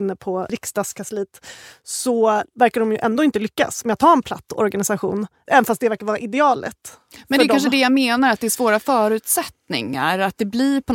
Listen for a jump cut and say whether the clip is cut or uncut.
uncut